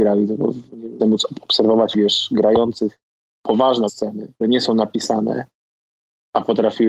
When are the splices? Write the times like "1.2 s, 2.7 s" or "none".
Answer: 1.0 s, 1.9 s, 3.9 s, 4.4 s